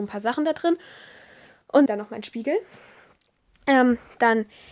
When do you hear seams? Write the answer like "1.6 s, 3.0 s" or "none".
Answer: 1.9 s